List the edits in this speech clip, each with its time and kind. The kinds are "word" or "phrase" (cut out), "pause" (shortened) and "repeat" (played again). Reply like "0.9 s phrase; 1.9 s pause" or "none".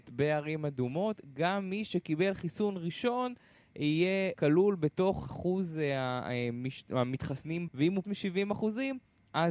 4.3 s word; 5.3 s word; 7.7 s word; 8.0 s word